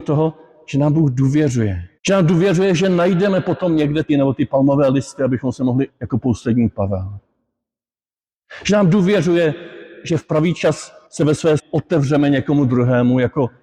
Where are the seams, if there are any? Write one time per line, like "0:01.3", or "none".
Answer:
0:02.0
0:04.1
0:05.9
0:11.1
0:11.6